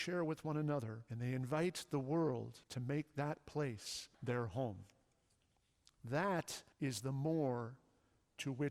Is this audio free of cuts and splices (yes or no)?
no